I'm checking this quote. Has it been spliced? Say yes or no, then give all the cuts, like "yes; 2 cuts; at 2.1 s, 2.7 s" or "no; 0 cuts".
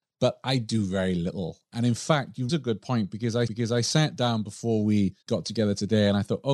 yes; 3 cuts; at 2.5 s, 3.5 s, 5.2 s